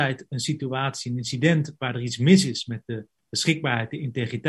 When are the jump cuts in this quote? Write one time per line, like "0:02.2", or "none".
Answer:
none